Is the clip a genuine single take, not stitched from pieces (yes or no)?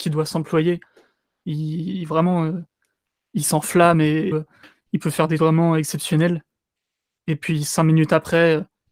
no